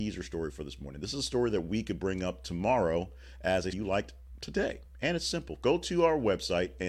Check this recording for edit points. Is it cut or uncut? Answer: cut